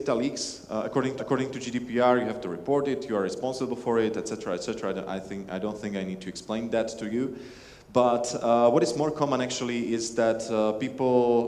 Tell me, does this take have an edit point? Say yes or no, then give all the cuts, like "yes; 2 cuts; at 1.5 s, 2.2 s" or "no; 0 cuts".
yes; 1 cut; at 1.2 s